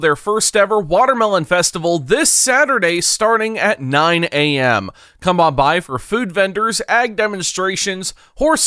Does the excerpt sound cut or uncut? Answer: uncut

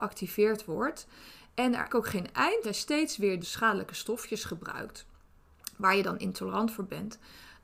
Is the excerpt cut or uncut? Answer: cut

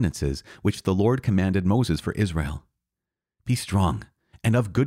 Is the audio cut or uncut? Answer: uncut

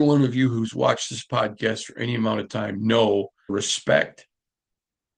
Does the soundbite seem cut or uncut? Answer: cut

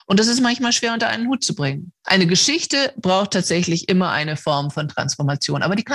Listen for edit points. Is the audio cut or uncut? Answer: uncut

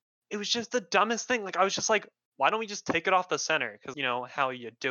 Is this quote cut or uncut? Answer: cut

